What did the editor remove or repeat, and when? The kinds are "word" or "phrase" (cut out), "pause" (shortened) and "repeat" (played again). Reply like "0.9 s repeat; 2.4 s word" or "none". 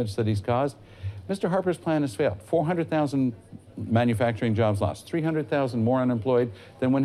none